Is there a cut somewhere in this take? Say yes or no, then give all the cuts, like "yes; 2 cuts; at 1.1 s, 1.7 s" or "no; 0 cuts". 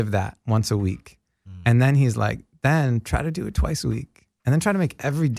no; 0 cuts